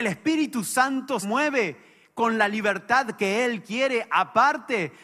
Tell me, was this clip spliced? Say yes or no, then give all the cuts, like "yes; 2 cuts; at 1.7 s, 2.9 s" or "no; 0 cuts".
yes; 1 cut; at 1.2 s